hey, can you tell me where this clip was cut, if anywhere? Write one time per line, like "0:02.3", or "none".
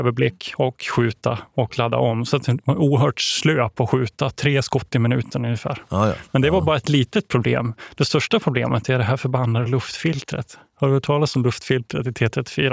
none